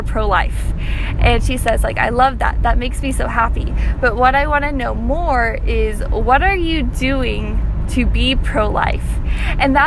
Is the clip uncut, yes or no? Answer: yes